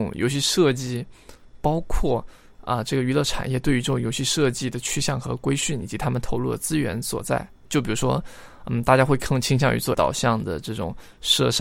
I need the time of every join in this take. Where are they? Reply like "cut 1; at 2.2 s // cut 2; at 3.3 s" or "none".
cut 1; at 7.5 s // cut 2; at 9.9 s